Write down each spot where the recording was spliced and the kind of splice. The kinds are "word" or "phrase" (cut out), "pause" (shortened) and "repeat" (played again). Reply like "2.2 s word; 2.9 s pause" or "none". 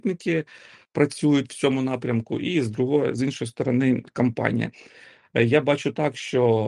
none